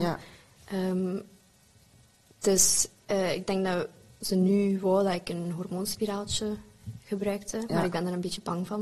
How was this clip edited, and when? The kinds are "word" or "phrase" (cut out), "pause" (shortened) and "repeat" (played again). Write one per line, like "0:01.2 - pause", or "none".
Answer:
none